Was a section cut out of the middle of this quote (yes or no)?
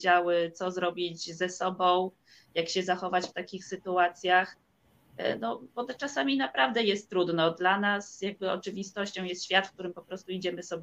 no